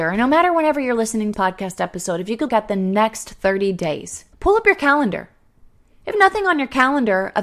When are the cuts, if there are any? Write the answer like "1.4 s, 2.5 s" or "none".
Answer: 1.3 s, 2.5 s, 4.3 s, 6.1 s

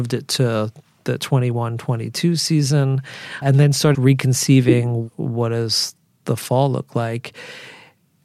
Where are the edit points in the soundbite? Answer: 3.4 s, 3.9 s

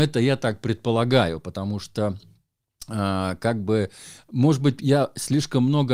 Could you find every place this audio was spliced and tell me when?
none

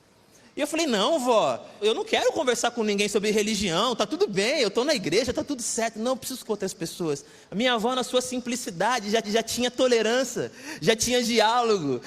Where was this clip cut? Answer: 1.8 s, 6.4 s, 7.4 s, 9.2 s

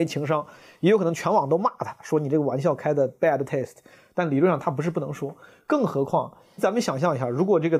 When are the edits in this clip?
none

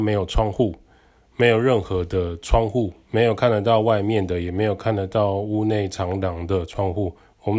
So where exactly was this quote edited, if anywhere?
3.0 s

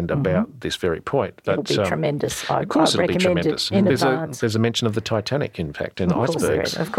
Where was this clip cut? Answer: none

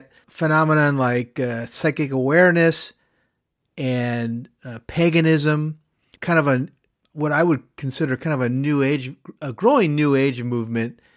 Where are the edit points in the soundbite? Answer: none

